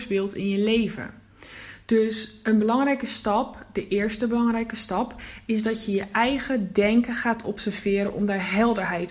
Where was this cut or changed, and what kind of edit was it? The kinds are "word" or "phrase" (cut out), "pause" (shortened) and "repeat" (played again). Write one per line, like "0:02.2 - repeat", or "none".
none